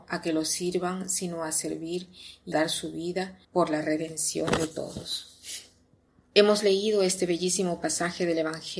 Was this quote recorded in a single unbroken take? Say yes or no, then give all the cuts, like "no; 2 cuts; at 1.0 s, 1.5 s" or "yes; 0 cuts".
no; 3 cuts; at 2.5 s, 3.4 s, 6.1 s